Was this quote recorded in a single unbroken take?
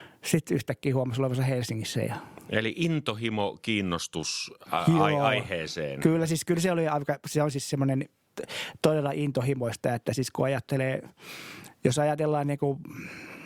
yes; 0 cuts

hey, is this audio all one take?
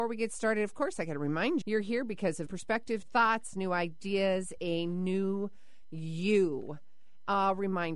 no; 4 cuts; at 1.6 s, 2.5 s, 3.0 s, 4.6 s

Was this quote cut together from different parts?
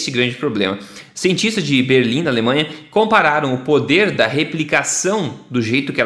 no; 0 cuts

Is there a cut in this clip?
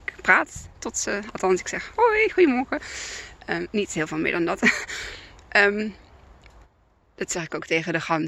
no; 0 cuts

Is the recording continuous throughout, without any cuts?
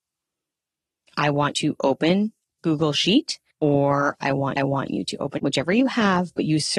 no; 5 cuts; at 1.5 s, 2.6 s, 3.5 s, 4.6 s, 5.4 s

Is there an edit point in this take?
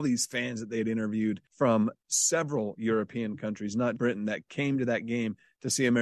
yes; 2 cuts; at 1.5 s, 4.0 s

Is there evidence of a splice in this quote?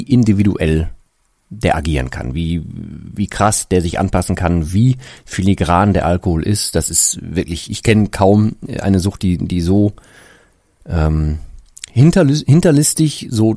no; 0 cuts

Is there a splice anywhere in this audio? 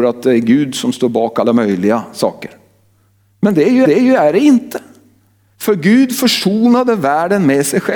yes; 1 cut; at 3.8 s

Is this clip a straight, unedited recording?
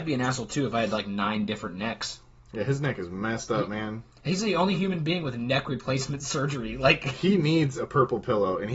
no; 1 cut; at 2.4 s

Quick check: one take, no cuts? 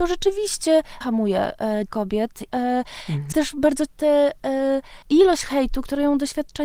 no; 6 cuts; at 1.0 s, 1.9 s, 2.5 s, 3.3 s, 3.9 s, 5.0 s

